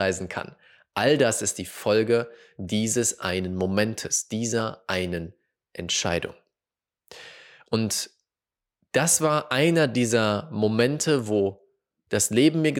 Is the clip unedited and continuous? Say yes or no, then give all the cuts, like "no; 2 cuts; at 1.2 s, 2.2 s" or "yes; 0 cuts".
yes; 0 cuts